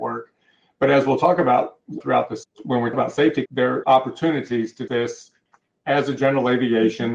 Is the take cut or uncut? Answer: cut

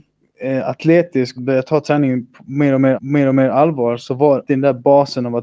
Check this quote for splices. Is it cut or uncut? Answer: cut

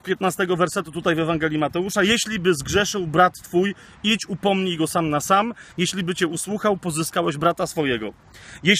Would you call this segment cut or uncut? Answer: uncut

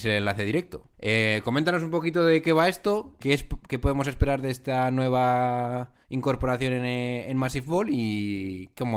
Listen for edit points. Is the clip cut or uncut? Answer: cut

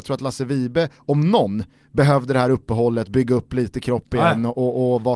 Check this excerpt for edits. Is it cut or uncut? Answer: cut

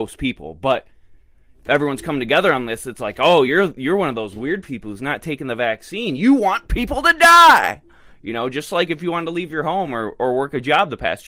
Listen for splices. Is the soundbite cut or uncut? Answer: uncut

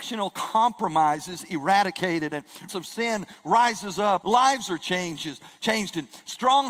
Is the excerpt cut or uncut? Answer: cut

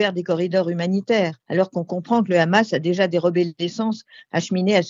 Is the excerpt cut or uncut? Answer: cut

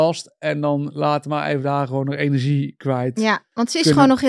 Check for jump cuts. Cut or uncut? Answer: uncut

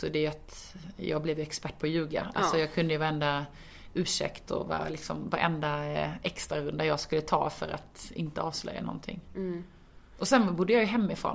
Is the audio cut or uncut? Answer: uncut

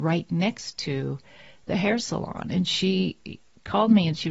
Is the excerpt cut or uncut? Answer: uncut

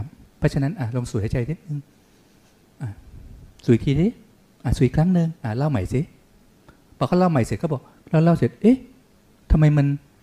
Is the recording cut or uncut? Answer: uncut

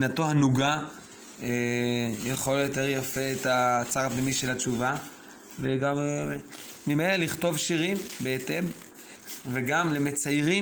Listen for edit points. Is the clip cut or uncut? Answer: uncut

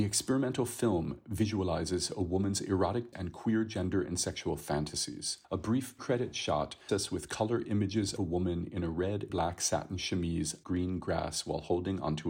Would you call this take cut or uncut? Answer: cut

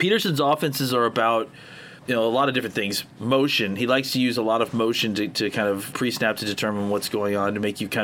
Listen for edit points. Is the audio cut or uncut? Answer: cut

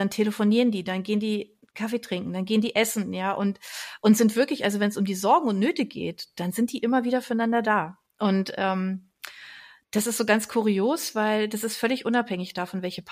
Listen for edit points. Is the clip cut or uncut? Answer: uncut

